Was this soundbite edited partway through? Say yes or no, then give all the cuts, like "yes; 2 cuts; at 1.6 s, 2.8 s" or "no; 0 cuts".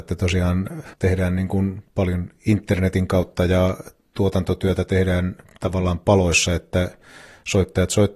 yes; 1 cut; at 0.9 s